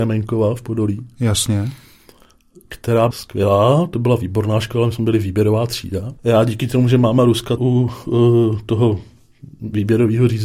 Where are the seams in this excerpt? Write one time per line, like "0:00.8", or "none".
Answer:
0:03.1
0:06.2
0:07.6